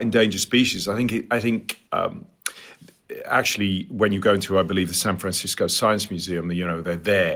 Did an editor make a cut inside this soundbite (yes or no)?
yes